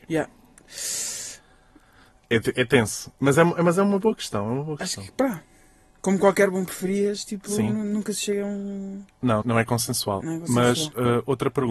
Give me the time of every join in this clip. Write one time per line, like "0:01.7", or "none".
0:09.4